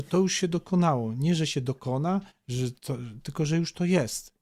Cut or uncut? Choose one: uncut